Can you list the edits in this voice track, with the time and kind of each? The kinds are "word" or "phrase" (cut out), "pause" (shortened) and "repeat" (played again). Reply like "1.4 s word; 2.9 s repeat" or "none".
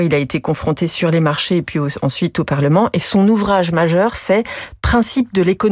none